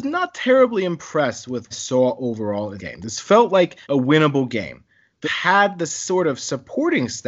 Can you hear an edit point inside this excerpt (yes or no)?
yes